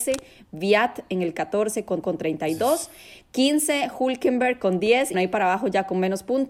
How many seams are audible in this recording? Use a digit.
2